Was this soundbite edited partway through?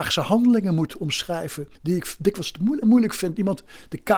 yes; 2 cuts; at 1.7 s, 2.8 s

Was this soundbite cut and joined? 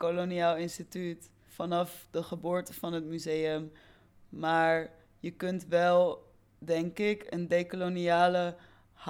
no; 0 cuts

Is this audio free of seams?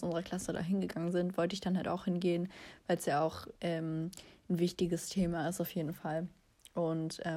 yes; 0 cuts

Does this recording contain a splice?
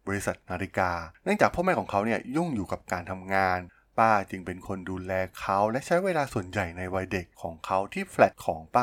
no; 0 cuts

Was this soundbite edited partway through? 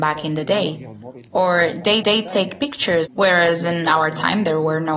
yes; 2 cuts; at 2.0 s, 3.1 s

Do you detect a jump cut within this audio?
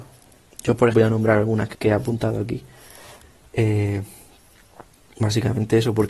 yes; 2 cuts; at 0.9 s, 1.7 s

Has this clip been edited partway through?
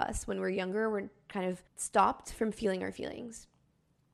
yes; 1 cut; at 1.7 s

